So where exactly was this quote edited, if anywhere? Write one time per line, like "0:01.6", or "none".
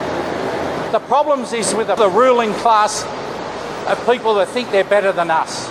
0:02.0